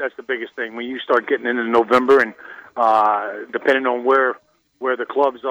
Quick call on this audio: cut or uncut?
uncut